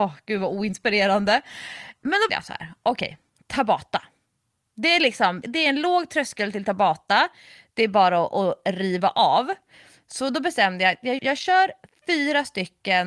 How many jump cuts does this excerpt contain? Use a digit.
3